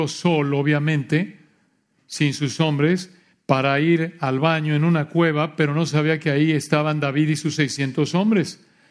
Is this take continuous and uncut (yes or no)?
yes